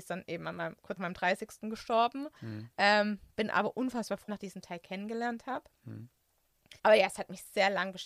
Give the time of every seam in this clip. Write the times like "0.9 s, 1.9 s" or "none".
1.0 s, 2.4 s, 4.3 s, 6.8 s